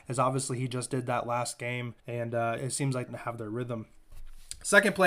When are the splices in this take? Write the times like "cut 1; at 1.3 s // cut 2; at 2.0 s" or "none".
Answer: cut 1; at 2.0 s // cut 2; at 2.6 s // cut 3; at 3.1 s